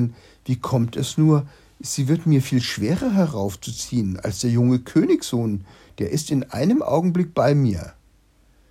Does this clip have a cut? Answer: no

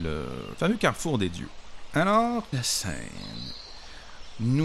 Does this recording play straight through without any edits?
no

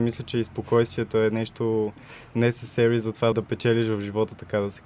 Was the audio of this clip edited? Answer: yes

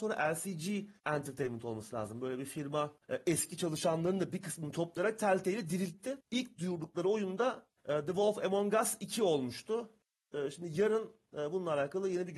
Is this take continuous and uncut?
no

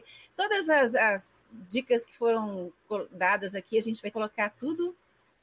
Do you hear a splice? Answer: yes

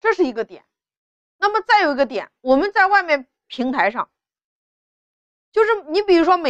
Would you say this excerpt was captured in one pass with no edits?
yes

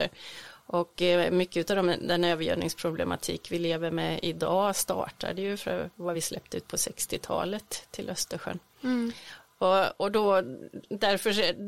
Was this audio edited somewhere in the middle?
no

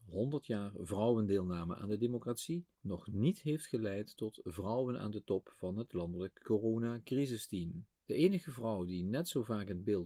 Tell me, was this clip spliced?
yes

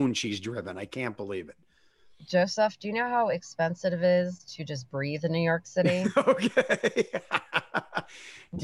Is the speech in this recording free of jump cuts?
yes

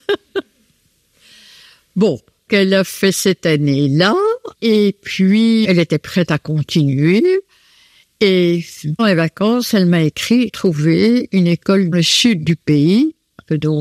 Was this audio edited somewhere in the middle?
yes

